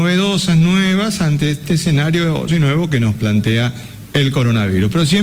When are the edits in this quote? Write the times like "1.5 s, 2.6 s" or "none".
2.5 s